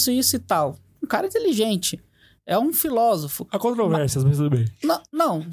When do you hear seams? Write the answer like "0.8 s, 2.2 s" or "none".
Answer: none